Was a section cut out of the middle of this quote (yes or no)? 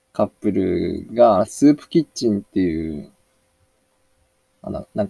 no